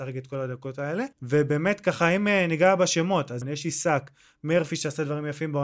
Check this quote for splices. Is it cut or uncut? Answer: cut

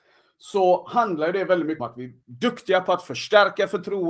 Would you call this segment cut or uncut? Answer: cut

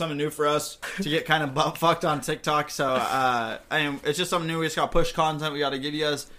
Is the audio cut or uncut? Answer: uncut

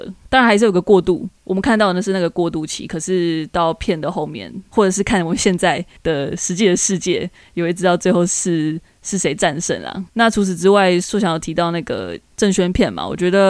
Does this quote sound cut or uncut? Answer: cut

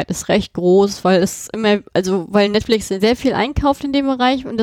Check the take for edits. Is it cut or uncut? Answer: uncut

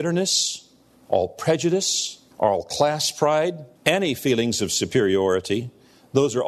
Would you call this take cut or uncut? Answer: cut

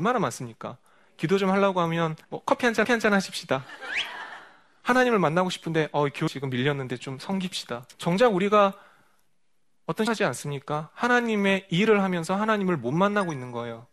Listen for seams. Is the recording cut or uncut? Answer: cut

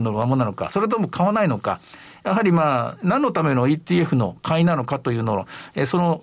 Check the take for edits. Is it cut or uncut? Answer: uncut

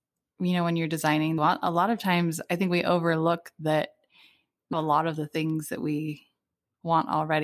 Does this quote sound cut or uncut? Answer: cut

